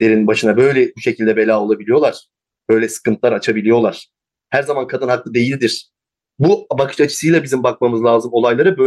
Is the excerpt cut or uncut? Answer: uncut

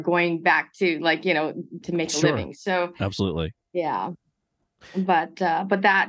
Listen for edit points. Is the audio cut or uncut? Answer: cut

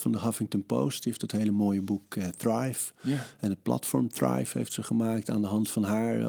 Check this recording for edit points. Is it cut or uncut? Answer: uncut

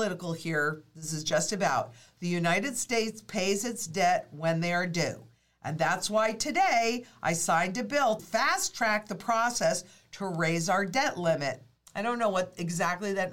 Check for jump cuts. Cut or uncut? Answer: cut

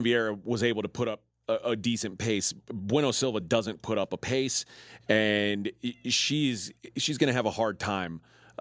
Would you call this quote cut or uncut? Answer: uncut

